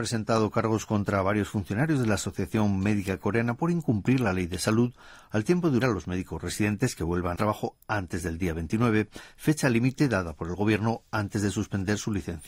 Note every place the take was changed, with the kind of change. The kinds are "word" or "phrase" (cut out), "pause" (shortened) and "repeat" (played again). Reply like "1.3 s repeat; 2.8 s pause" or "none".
5.8 s word; 7.4 s word